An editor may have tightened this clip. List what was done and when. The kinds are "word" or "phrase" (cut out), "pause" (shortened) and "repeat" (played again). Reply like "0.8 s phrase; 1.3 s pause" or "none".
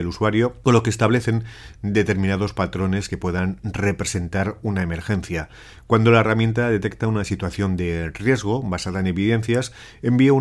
none